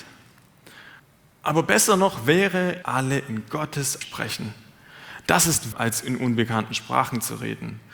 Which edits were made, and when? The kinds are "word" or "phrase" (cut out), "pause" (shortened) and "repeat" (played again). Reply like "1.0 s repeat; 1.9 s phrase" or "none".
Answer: 1.0 s pause; 2.8 s phrase; 4.0 s phrase; 5.7 s word